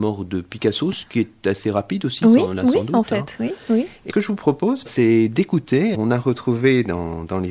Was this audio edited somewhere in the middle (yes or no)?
yes